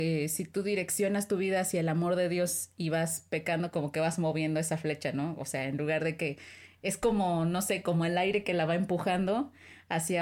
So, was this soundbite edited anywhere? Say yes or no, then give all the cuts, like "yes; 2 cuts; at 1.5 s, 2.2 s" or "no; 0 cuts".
no; 0 cuts